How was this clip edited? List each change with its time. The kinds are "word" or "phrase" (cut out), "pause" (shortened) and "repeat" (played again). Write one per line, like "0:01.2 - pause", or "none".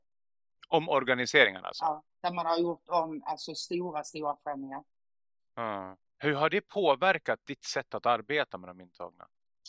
none